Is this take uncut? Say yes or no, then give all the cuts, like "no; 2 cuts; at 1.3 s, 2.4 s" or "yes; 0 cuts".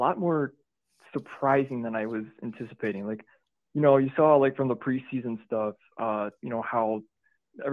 yes; 0 cuts